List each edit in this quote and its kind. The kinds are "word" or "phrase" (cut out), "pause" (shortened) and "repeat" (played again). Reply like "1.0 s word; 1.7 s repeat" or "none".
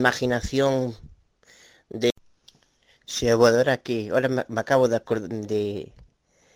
none